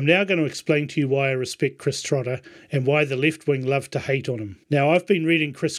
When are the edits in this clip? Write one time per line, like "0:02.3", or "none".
0:04.6